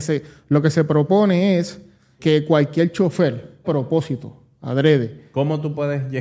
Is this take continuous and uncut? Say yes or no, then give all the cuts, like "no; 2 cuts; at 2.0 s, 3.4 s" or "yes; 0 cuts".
no; 2 cuts; at 2.2 s, 3.6 s